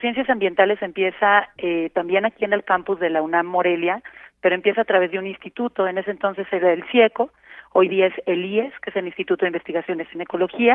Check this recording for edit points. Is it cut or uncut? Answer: uncut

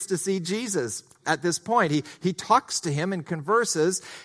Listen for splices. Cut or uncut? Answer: uncut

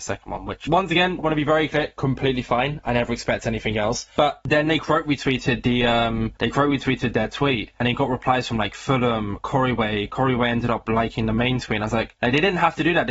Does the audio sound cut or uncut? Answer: uncut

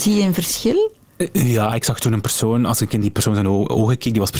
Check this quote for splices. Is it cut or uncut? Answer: uncut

